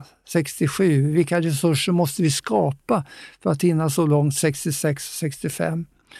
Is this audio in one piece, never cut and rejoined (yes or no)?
yes